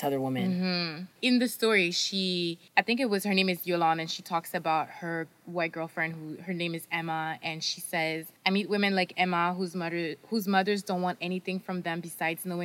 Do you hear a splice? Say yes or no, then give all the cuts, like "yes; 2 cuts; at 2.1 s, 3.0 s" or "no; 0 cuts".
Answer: yes; 3 cuts; at 1.1 s, 2.7 s, 8.4 s